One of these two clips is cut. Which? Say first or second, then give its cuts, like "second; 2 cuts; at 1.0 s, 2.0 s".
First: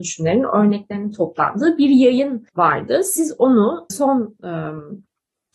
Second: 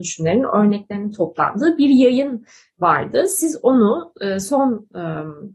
first; 2 cuts; at 2.5 s, 3.9 s